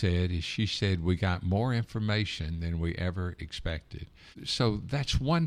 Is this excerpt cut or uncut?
uncut